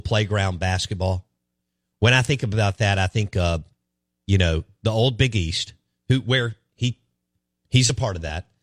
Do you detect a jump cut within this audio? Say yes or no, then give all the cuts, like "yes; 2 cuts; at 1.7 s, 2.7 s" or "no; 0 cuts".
no; 0 cuts